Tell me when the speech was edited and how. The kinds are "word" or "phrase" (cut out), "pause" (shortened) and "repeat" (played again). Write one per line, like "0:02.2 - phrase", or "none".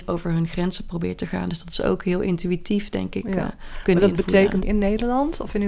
0:04.6 - phrase